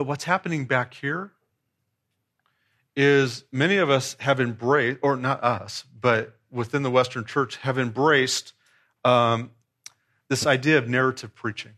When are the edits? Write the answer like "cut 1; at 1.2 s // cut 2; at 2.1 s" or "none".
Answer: none